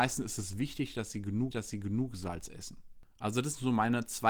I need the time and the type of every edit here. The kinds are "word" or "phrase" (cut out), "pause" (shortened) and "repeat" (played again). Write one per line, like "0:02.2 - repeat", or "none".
0:01.5 - repeat